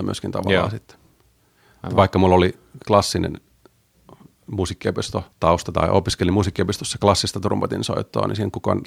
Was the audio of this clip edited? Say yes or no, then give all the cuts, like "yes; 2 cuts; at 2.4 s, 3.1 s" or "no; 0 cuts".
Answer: yes; 1 cut; at 5.3 s